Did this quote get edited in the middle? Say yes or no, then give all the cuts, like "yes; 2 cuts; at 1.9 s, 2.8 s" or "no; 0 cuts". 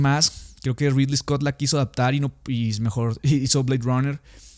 no; 0 cuts